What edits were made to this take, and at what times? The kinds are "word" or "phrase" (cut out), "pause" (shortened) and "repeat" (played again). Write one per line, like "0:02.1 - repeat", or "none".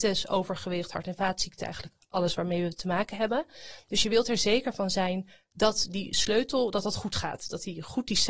none

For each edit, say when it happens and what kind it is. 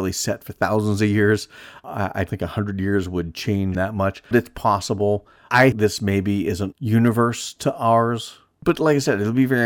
0:02.3 - word
0:03.7 - word
0:04.3 - word
0:05.7 - word
0:06.7 - word

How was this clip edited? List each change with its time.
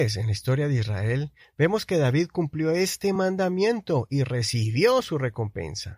none

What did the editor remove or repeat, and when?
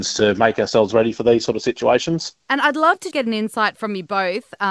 0:03.1 - word

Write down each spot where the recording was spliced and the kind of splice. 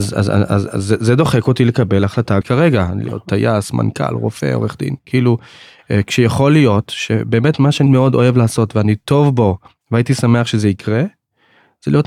0:02.4 - word
0:07.9 - word

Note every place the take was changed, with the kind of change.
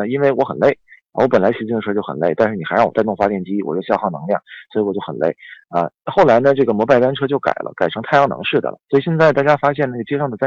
0:08.8 - pause

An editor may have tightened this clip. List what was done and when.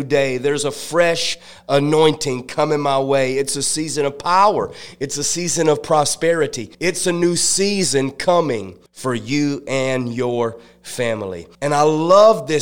0:06.7 - pause
0:08.9 - pause
0:11.5 - pause

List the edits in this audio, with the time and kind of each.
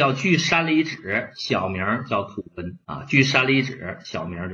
0:02.8 - pause

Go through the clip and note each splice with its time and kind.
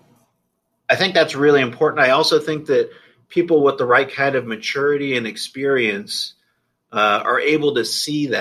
none

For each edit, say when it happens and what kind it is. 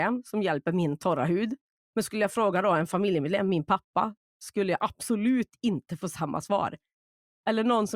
none

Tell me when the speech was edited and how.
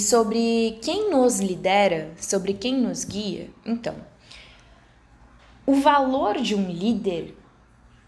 none

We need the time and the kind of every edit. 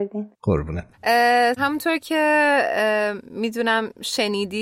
0:01.5 - phrase

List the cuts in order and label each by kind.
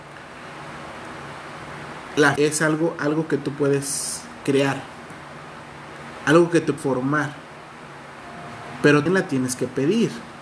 0:02.4 - word
0:06.8 - word
0:09.1 - word

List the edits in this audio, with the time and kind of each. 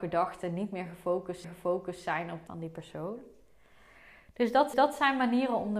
0:01.4 - repeat
0:02.5 - phrase
0:04.7 - repeat

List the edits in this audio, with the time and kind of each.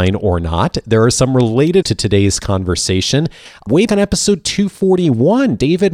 0:01.8 - word
0:03.9 - word

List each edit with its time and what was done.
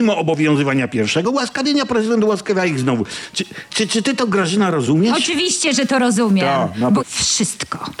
0:03.7 - word
0:07.0 - phrase

